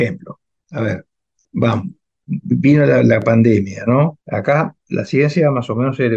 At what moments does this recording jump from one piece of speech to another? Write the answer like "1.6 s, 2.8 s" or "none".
2.4 s, 4.2 s